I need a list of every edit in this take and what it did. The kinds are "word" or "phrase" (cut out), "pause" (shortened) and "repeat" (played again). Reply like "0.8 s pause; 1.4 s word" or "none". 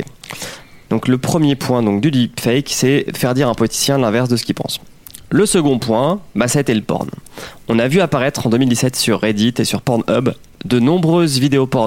none